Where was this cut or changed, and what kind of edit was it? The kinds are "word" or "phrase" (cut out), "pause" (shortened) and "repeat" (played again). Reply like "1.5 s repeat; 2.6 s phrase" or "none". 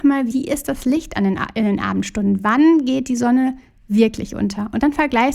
none